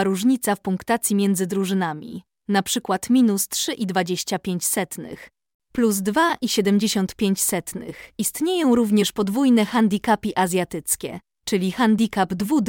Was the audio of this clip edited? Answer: no; 0 cuts

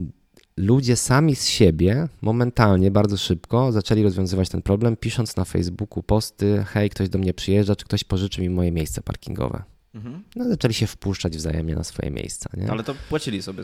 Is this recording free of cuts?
yes; 0 cuts

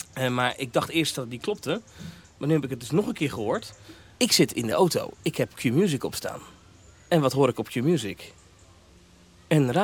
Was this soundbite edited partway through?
no; 0 cuts

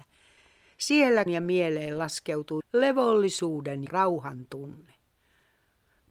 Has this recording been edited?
yes; 3 cuts; at 1.3 s, 2.6 s, 3.9 s

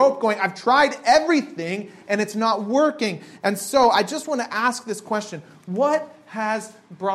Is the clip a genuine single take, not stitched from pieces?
yes; 0 cuts

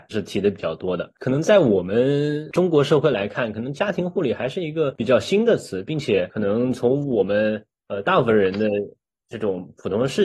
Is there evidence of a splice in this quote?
no; 0 cuts

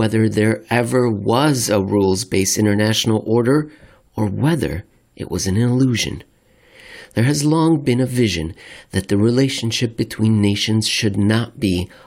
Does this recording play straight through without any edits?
yes; 0 cuts

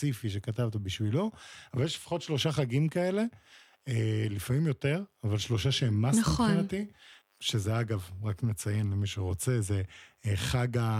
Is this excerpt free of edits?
yes; 0 cuts

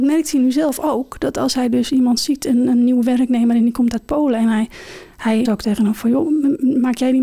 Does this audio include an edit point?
yes; 1 cut; at 5.5 s

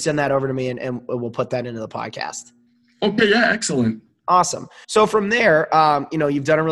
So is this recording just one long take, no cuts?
no; 2 cuts; at 2.7 s, 4.8 s

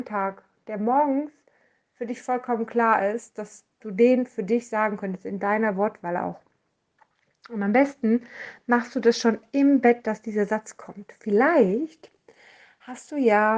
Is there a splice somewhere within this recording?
no; 0 cuts

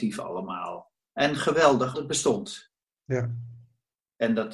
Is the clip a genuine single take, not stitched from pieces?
no; 2 cuts; at 1.1 s, 1.9 s

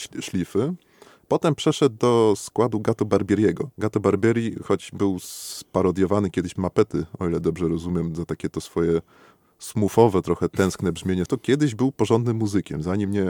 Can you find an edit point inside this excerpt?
yes; 3 cuts; at 3.7 s, 6.6 s, 11.3 s

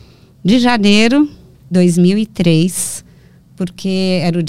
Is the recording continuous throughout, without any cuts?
no; 1 cut; at 1.7 s

